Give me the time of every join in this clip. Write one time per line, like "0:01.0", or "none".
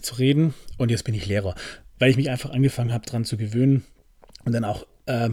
none